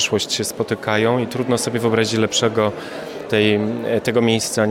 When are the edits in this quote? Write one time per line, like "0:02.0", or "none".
0:03.3